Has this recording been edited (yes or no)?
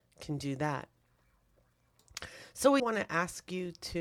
yes